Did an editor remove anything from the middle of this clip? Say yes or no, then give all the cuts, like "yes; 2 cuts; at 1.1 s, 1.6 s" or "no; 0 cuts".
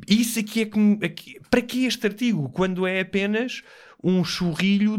no; 0 cuts